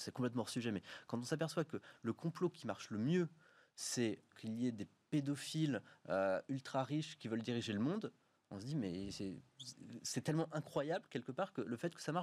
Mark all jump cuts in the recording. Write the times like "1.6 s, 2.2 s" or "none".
4.3 s